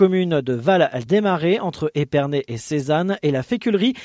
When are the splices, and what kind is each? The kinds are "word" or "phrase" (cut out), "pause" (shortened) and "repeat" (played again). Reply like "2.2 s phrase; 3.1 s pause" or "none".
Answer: none